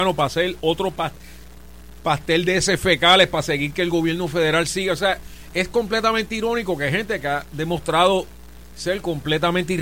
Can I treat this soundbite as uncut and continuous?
yes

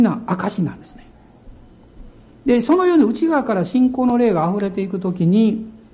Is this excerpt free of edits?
yes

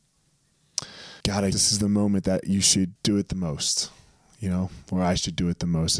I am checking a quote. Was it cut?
yes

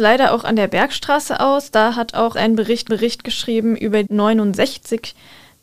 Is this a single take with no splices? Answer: no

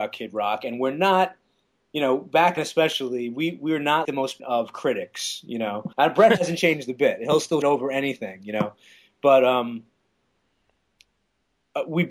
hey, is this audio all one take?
no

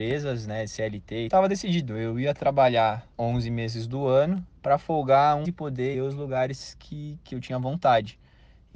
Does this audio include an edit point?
yes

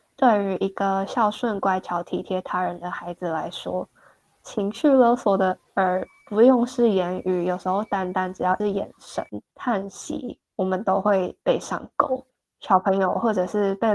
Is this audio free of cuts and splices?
yes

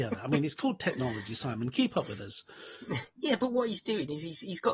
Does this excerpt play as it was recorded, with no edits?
yes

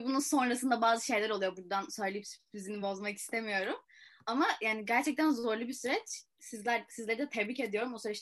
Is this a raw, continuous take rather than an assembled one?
yes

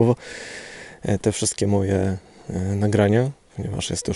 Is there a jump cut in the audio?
no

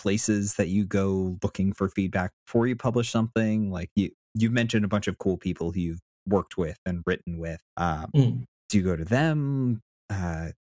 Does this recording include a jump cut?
yes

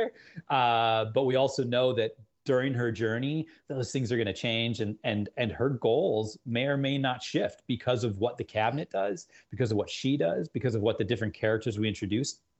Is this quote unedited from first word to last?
yes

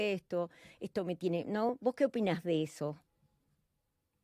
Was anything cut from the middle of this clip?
no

